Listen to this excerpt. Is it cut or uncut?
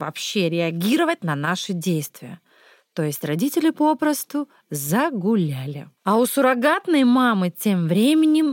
cut